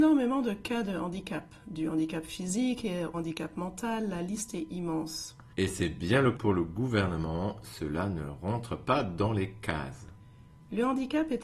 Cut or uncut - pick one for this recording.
cut